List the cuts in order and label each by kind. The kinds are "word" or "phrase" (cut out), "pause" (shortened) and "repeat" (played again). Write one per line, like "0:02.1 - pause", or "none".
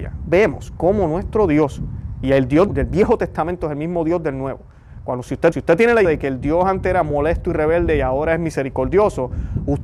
0:02.7 - word
0:05.5 - repeat
0:06.0 - word

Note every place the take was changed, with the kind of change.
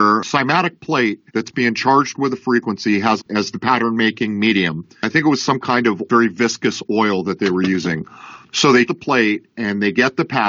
0:01.3 - pause
0:03.2 - phrase
0:06.1 - word
0:08.5 - pause
0:08.9 - word

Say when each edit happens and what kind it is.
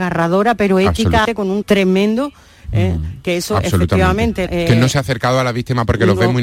0:01.2 - word
0:01.6 - word
0:04.5 - word

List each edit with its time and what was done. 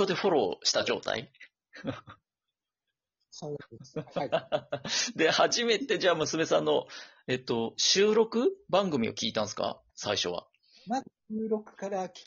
none

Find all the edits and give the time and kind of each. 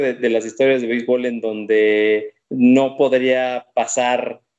0:02.4 - pause

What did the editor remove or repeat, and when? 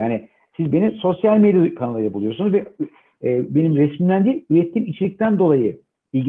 none

